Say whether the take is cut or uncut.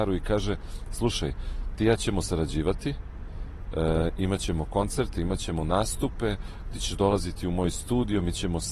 uncut